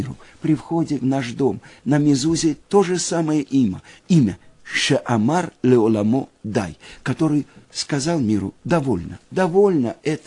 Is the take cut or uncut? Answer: cut